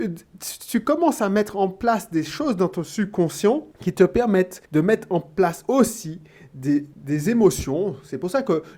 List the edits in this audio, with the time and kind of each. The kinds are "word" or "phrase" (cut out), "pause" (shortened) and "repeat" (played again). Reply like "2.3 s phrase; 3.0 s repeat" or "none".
3.7 s pause; 4.6 s pause; 6.9 s pause